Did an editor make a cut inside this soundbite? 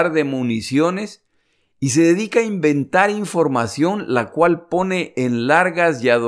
no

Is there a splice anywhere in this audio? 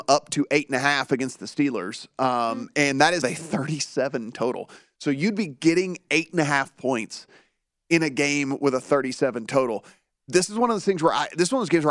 yes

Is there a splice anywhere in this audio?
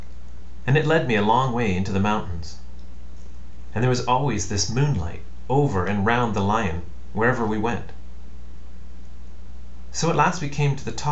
no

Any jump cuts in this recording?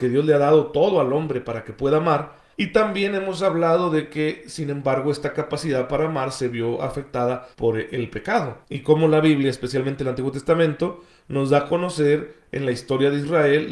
yes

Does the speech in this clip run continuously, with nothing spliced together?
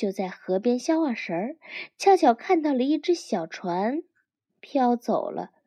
yes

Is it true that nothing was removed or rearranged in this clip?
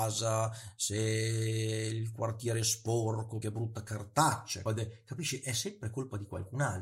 no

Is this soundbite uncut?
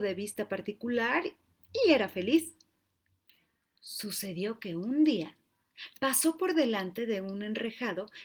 yes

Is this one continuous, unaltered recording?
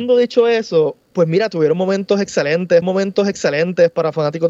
no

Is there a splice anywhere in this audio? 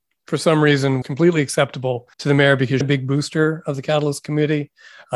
yes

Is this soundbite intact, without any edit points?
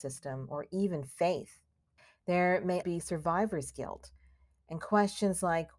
no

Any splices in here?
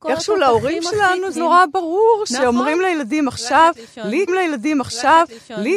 yes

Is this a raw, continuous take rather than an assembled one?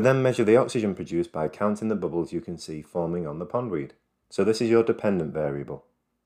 yes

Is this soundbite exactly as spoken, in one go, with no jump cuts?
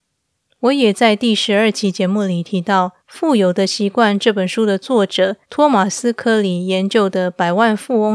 no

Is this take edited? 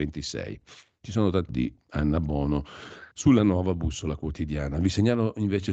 yes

